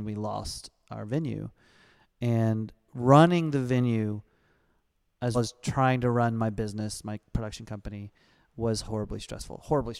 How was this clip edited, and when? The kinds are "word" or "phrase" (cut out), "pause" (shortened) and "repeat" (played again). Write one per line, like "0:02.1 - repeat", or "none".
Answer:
0:05.3 - word
0:08.8 - word